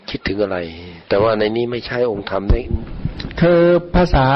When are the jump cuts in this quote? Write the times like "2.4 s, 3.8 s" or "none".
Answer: 1.0 s